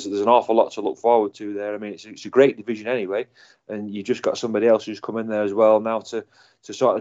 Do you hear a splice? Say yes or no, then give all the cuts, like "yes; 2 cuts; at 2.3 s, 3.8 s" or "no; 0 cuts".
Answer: no; 0 cuts